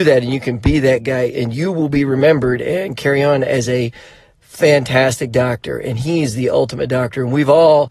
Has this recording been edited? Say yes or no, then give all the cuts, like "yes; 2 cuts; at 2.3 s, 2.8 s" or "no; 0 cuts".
no; 0 cuts